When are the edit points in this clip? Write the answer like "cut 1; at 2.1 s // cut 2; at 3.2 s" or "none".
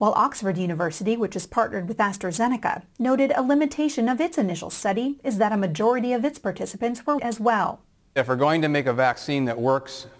cut 1; at 7.2 s